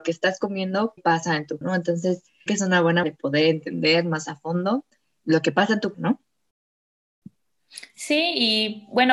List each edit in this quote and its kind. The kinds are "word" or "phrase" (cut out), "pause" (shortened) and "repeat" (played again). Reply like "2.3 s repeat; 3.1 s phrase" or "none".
1.0 s word; 1.6 s word; 2.5 s word; 3.0 s word; 5.2 s word; 5.9 s phrase